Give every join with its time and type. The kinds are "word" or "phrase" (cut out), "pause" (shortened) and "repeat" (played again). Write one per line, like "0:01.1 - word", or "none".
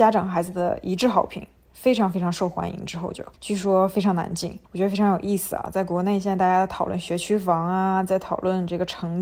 0:03.3 - pause
0:04.7 - pause